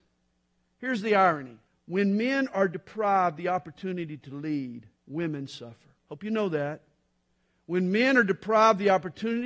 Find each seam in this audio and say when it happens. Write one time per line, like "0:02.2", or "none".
0:01.7
0:05.0
0:06.0